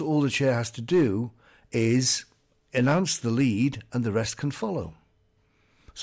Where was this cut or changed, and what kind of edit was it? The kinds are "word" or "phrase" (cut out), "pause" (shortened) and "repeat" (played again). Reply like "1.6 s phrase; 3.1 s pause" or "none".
none